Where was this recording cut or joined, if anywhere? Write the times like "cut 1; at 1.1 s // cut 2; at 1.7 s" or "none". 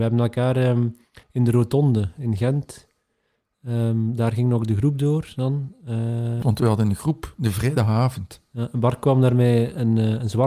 cut 1; at 1.2 s // cut 2; at 6.4 s